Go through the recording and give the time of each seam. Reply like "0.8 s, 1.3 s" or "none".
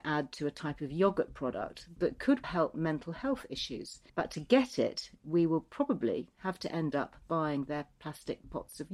2.4 s, 4.1 s